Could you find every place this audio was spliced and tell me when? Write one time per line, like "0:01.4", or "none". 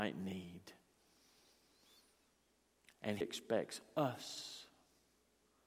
0:03.2